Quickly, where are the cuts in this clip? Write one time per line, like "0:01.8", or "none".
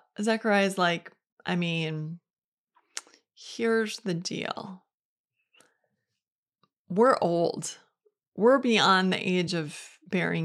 none